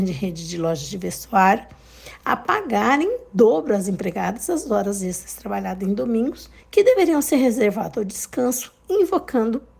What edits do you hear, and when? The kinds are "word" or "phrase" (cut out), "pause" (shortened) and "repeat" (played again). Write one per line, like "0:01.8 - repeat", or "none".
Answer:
0:06.6 - pause